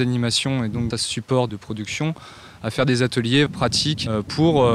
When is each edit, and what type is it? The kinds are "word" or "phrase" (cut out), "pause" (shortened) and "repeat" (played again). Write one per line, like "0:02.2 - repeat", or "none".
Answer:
0:00.9 - word
0:01.5 - word
0:03.5 - word